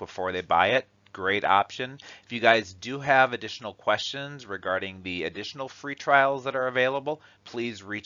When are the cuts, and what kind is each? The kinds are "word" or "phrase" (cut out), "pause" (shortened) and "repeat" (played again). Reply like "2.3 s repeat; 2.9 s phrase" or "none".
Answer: none